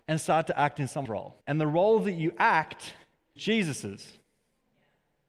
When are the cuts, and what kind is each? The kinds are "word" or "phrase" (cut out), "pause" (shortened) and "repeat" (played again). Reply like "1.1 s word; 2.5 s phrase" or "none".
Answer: 1.0 s word; 1.4 s pause; 3.4 s word